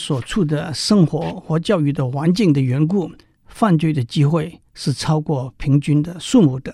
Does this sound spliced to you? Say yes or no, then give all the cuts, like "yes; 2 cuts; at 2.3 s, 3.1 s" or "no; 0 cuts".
yes; 2 cuts; at 3.2 s, 4.7 s